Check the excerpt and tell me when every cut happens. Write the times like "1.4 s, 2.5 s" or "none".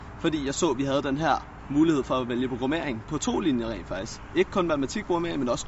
none